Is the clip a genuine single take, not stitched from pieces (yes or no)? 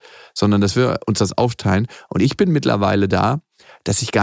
yes